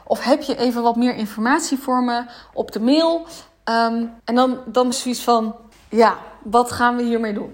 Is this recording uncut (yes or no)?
no